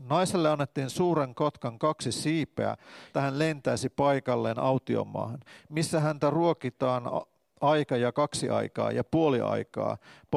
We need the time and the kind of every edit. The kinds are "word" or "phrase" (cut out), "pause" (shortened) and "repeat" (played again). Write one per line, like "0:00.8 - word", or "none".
0:03.1 - word